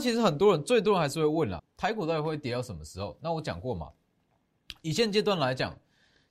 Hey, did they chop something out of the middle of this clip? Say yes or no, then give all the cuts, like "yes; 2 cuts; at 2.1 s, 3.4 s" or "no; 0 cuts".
yes; 1 cut; at 1.6 s